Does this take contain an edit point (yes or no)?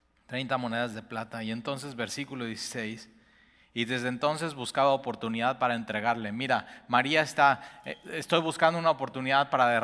no